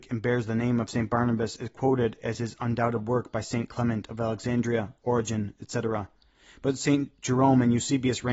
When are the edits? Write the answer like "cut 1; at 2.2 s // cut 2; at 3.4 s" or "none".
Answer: none